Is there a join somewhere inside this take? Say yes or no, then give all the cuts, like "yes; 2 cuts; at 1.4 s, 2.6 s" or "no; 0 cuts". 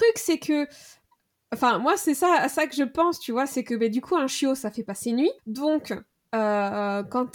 yes; 1 cut; at 5.4 s